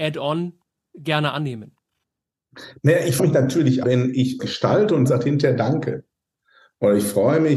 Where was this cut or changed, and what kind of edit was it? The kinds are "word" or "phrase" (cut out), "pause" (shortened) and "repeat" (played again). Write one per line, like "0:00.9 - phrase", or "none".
0:03.2 - word
0:03.8 - word
0:04.4 - word
0:05.1 - word